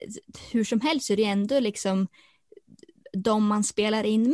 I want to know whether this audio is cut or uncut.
uncut